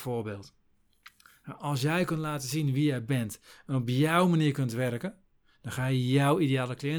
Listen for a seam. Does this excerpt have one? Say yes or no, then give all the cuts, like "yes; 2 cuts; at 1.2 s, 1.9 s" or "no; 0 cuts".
no; 0 cuts